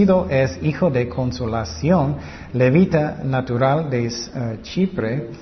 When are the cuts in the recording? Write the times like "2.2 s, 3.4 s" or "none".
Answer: none